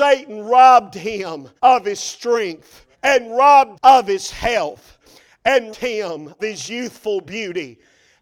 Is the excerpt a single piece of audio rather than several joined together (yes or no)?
no